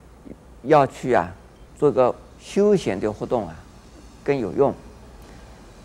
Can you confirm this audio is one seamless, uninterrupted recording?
no; 2 cuts; at 1.7 s, 2.3 s

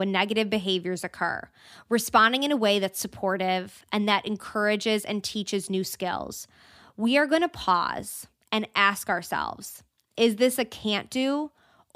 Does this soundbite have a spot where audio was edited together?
no; 0 cuts

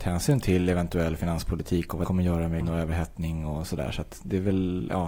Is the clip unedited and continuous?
no; 2 cuts; at 2.0 s, 2.6 s

